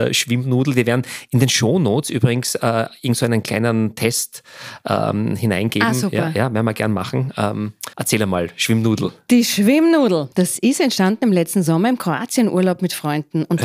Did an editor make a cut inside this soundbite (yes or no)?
yes